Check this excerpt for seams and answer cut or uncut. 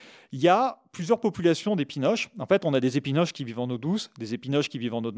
uncut